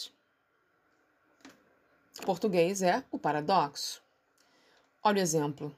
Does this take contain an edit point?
yes; 1 cut; at 2.2 s

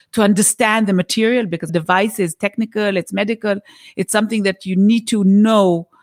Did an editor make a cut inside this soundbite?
yes; 1 cut; at 1.7 s

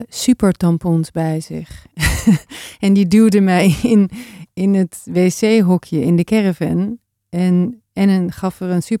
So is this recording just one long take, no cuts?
yes; 0 cuts

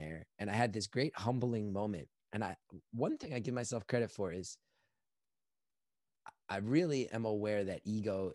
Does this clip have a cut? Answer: no; 0 cuts

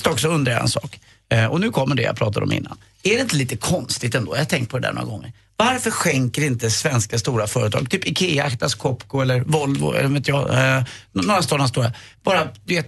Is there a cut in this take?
no; 0 cuts

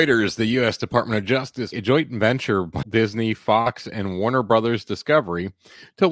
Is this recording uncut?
no; 2 cuts; at 1.7 s, 2.8 s

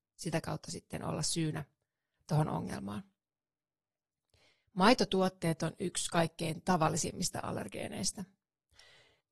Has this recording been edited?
no; 0 cuts

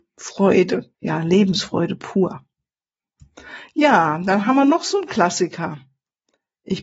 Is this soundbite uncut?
no; 1 cut; at 0.9 s

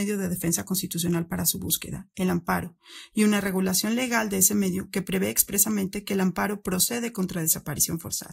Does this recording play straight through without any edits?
yes; 0 cuts

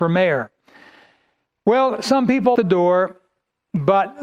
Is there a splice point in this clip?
yes; 1 cut; at 2.5 s

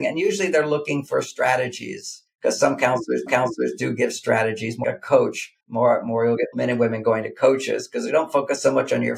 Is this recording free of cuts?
no; 5 cuts; at 2.3 s, 3.3 s, 4.8 s, 5.6 s, 6.5 s

